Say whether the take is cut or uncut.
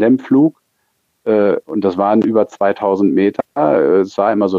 uncut